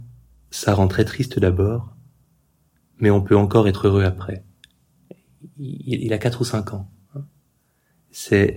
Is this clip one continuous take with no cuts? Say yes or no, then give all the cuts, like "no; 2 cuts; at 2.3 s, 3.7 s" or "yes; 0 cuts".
yes; 0 cuts